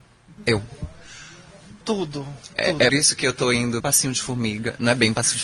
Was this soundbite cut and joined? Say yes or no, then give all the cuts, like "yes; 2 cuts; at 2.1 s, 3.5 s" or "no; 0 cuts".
yes; 3 cuts; at 1.8 s, 2.9 s, 3.8 s